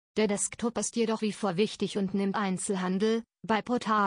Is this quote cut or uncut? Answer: cut